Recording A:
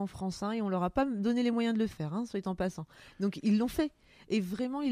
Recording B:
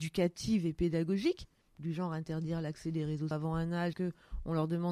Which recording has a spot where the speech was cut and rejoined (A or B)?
B